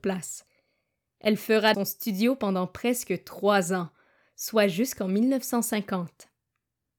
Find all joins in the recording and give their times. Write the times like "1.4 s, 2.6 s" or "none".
1.7 s